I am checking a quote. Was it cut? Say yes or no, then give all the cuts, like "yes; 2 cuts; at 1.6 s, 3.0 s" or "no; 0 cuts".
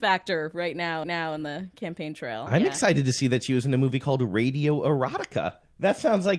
yes; 1 cut; at 1.0 s